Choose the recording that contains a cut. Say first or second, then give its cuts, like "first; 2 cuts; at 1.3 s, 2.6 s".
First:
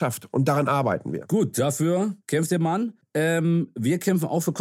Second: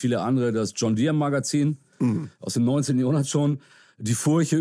first; 2 cuts; at 2.2 s, 3.0 s